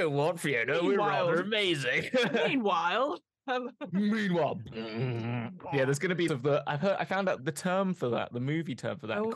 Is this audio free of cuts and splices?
no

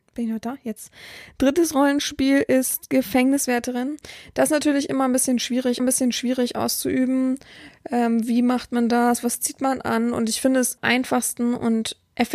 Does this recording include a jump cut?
yes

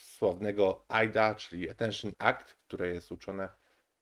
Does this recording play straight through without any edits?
no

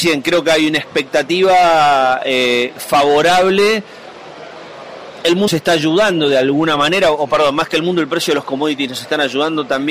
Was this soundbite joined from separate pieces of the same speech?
yes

